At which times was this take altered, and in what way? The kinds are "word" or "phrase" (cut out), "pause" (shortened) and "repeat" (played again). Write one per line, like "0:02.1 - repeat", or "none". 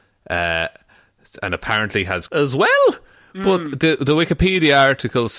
0:02.3 - word